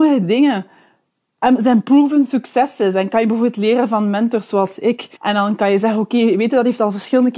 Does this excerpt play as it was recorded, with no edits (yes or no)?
no